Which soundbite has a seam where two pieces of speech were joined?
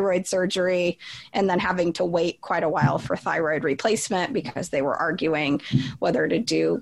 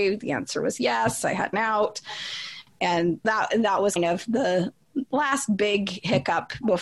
second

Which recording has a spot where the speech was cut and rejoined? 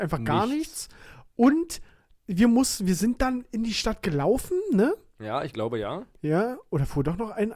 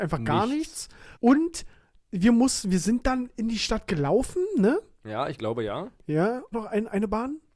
second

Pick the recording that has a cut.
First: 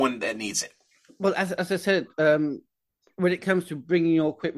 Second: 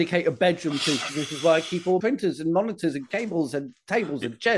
second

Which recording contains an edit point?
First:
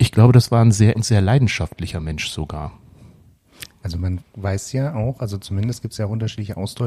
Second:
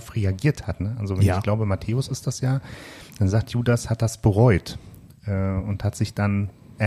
first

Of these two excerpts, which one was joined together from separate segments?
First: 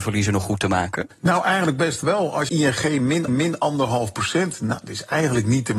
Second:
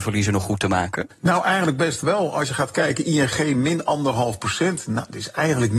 first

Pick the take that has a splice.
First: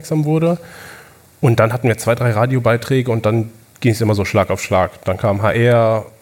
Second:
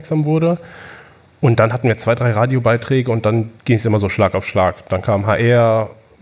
second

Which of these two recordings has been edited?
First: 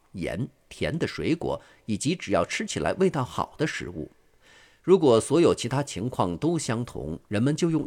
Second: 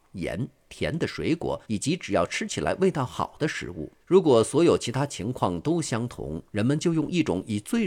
second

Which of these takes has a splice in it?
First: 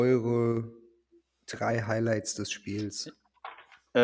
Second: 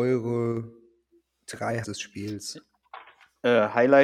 second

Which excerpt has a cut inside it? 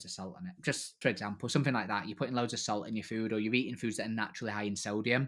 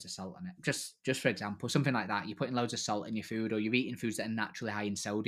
first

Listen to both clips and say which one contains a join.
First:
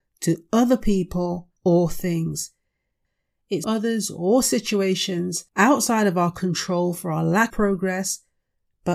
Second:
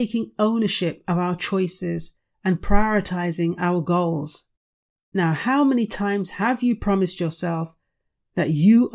first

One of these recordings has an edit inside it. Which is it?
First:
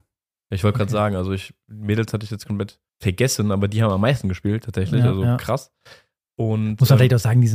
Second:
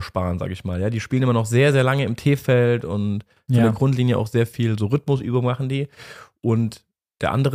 first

